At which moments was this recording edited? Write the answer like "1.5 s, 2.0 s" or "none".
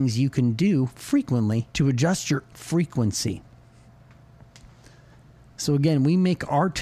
1.7 s, 2.5 s